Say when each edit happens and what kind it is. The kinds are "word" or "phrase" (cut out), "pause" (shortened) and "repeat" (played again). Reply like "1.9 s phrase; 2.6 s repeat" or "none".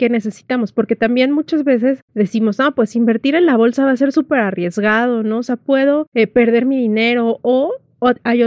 none